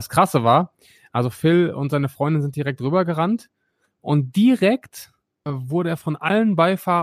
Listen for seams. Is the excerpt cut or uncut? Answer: uncut